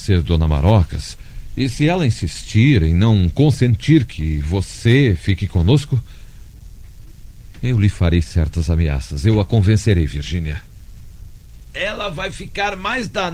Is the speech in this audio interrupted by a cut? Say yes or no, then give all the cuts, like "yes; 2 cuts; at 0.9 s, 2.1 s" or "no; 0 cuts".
no; 0 cuts